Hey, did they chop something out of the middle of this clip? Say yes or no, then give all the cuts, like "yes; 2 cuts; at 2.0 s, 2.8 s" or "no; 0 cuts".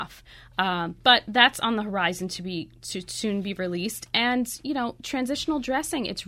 no; 0 cuts